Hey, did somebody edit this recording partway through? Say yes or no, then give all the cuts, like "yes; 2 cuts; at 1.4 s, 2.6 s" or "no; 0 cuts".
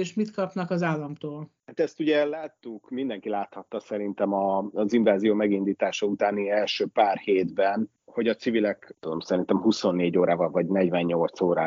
yes; 1 cut; at 1.6 s